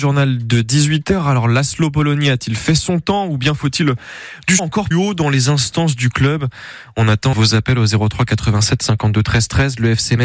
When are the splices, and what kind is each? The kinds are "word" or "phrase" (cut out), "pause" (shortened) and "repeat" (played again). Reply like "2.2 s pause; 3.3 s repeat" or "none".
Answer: 4.6 s word; 4.9 s word; 7.3 s word